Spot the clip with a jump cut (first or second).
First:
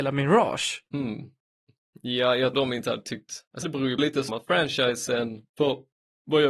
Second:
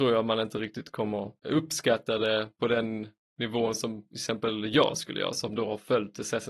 first